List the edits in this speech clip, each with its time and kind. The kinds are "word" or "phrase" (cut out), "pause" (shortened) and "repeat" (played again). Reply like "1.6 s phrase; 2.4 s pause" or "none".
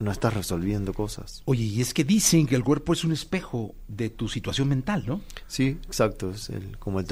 none

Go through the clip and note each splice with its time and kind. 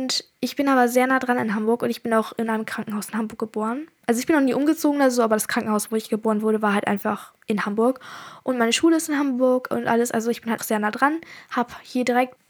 10.6 s word

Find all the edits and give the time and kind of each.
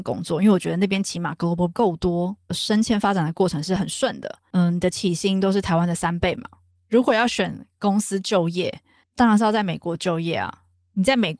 1.7 s word; 2.5 s word

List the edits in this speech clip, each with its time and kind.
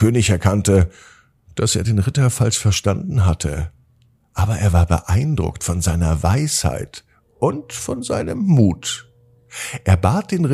none

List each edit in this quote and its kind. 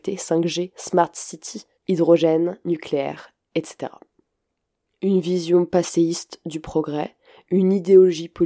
none

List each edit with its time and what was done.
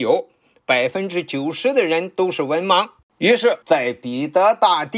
3.0 s pause; 3.6 s pause

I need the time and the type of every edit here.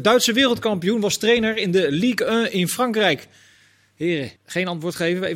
4.4 s pause

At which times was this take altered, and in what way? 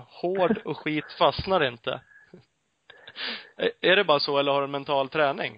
none

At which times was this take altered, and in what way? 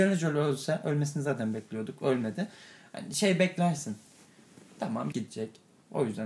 5.1 s word

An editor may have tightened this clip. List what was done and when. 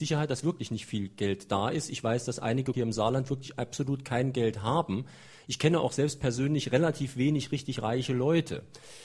2.7 s phrase

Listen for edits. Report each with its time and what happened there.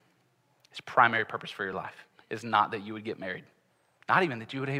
none

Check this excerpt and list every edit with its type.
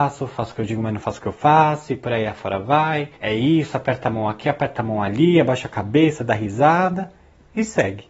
3.2 s pause

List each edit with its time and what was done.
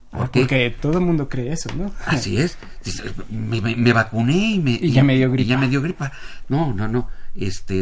none

